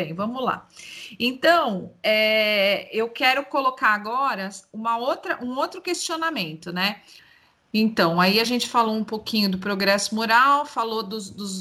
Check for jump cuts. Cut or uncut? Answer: uncut